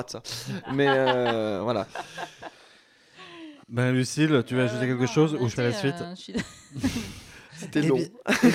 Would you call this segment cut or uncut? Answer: cut